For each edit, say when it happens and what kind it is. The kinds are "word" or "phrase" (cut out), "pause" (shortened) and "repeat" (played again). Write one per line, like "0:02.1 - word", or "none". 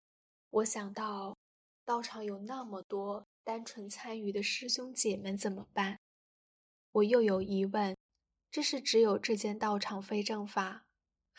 none